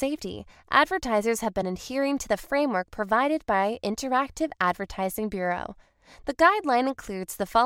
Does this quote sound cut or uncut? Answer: uncut